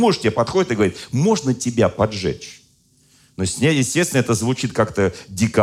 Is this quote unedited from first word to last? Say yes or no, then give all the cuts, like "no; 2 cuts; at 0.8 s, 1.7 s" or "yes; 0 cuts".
yes; 0 cuts